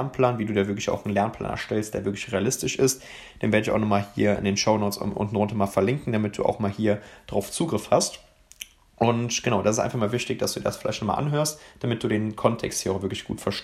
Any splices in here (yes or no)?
no